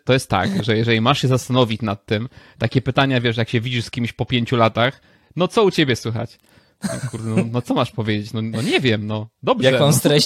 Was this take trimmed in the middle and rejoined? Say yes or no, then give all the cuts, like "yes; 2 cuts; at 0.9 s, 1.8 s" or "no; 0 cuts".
no; 0 cuts